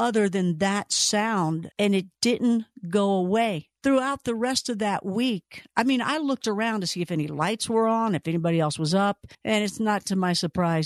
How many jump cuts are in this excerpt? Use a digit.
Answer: 3